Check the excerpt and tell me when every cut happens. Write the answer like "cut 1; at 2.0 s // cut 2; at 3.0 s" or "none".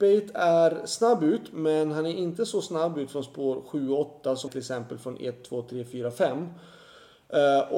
cut 1; at 4.5 s